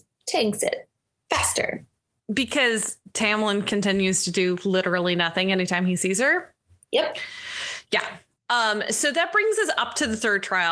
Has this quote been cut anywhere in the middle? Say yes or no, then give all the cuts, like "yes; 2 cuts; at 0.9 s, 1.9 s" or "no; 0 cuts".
no; 0 cuts